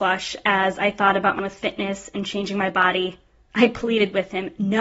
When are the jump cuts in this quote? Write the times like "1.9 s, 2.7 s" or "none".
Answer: 1.4 s